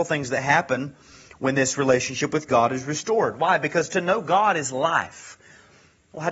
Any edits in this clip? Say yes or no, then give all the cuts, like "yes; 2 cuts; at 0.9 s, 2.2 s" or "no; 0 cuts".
no; 0 cuts